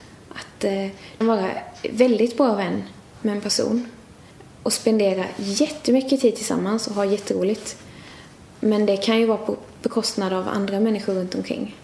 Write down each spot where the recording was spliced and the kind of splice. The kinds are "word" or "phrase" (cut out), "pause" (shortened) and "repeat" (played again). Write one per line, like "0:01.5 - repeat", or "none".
0:01.2 - word